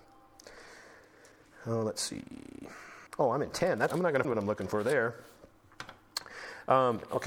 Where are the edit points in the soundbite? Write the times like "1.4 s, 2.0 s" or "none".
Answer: 3.1 s, 3.9 s, 4.2 s